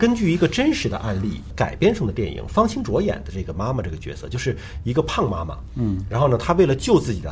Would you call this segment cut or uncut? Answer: uncut